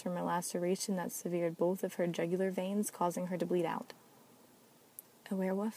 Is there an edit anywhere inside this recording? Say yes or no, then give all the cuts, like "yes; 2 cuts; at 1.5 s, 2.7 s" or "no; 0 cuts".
no; 0 cuts